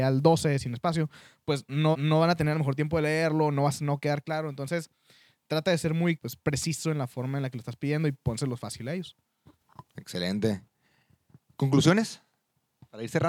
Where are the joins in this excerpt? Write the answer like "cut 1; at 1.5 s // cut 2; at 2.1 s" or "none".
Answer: cut 1; at 1.9 s // cut 2; at 6.2 s // cut 3; at 9.9 s